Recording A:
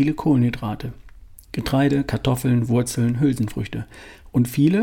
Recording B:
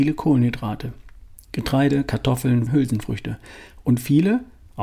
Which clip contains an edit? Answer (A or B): B